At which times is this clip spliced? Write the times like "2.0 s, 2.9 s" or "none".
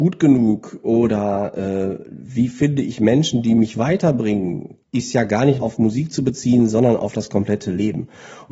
4.8 s, 5.6 s